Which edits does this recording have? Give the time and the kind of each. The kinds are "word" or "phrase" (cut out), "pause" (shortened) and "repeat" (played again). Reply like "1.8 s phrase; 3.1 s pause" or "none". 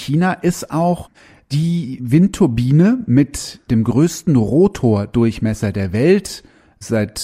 none